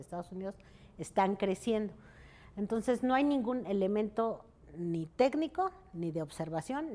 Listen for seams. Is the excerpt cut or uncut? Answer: uncut